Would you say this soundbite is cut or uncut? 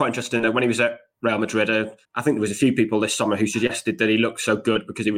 cut